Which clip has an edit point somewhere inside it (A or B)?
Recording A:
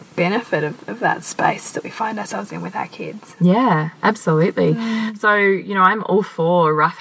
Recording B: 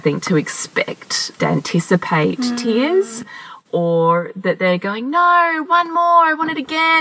B